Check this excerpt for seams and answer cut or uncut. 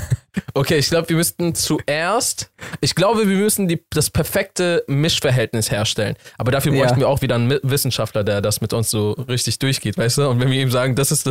uncut